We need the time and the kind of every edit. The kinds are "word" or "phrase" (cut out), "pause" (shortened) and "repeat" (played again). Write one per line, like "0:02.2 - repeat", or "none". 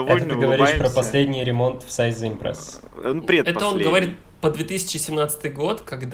none